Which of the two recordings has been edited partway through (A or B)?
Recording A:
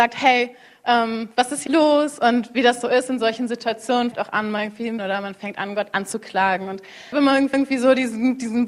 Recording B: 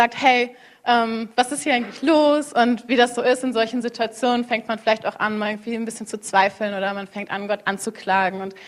A